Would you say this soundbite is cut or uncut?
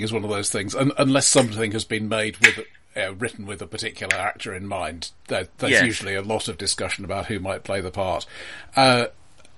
uncut